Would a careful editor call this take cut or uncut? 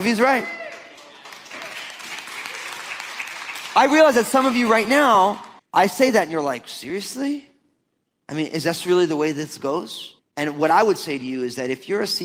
cut